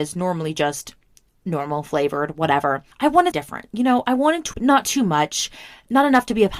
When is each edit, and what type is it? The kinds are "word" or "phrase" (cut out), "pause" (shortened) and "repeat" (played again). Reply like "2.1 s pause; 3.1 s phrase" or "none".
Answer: 2.9 s pause; 3.3 s word; 4.5 s word

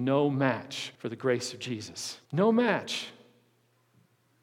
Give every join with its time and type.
0.9 s pause; 2.2 s pause

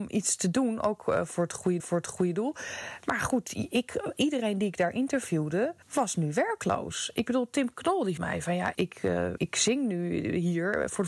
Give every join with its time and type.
1.8 s repeat; 5.8 s pause; 8.2 s word; 8.7 s word; 9.4 s word

